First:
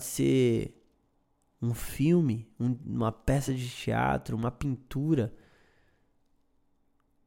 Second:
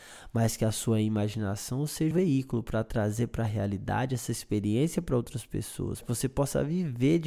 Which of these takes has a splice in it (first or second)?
second